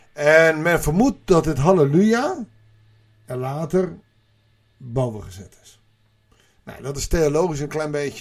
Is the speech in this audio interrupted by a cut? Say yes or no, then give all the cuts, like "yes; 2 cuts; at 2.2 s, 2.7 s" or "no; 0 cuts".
no; 0 cuts